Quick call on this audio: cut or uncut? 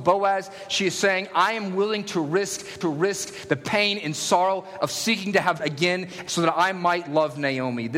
cut